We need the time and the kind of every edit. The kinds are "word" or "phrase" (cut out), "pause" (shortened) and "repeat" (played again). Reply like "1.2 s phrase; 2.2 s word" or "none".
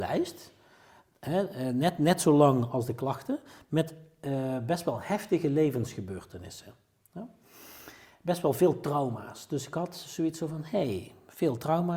none